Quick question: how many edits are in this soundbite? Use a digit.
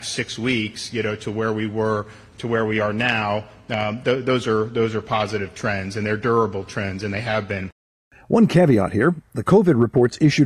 0